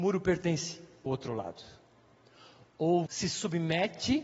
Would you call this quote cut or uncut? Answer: cut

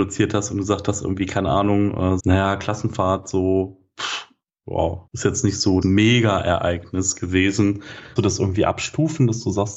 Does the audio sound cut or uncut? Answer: cut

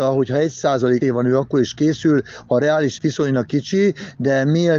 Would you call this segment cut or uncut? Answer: cut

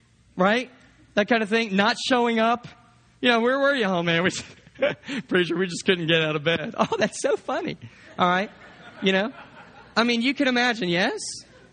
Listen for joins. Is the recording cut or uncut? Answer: uncut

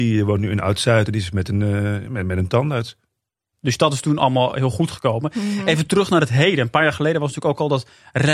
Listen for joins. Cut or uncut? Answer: uncut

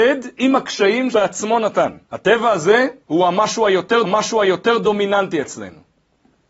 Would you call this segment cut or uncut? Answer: cut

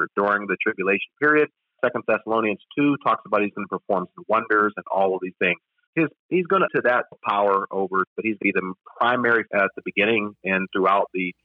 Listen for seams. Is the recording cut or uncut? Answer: cut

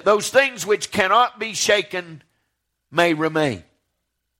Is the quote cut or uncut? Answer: uncut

